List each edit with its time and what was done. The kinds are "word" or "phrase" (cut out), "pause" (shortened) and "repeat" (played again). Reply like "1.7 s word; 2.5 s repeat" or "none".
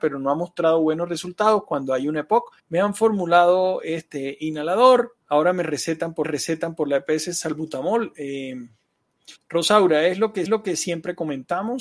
2.6 s pause; 5.2 s pause; 6.2 s repeat; 9.4 s pause; 10.5 s repeat